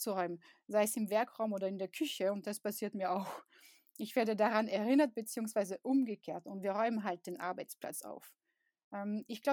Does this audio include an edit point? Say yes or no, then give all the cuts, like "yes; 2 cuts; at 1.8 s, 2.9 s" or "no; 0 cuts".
no; 0 cuts